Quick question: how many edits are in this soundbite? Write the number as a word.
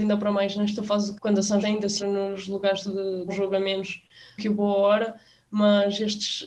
five